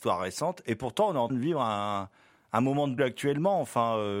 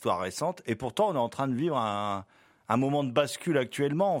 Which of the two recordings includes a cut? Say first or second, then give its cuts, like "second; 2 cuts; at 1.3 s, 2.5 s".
first; 2 cuts; at 1.3 s, 3.0 s